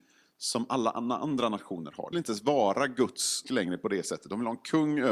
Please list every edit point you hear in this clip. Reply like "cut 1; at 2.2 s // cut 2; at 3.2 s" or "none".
cut 1; at 2.1 s // cut 2; at 3.4 s